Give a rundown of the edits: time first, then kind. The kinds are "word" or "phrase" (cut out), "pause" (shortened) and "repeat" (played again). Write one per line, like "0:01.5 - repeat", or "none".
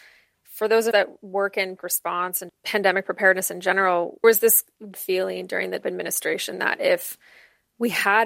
0:00.9 - word
0:01.8 - word
0:02.5 - word
0:04.2 - word
0:04.9 - word
0:05.8 - word